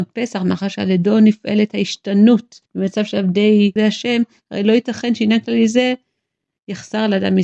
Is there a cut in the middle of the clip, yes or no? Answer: yes